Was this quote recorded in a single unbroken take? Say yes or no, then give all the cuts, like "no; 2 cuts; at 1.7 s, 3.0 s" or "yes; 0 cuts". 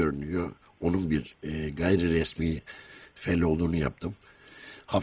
yes; 0 cuts